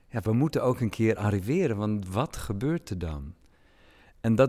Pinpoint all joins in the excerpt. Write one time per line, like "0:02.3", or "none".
none